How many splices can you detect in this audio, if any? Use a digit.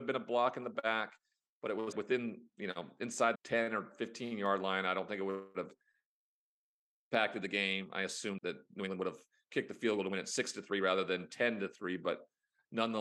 3